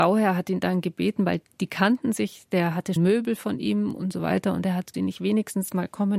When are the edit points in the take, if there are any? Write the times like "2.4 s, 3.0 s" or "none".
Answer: 3.0 s, 4.9 s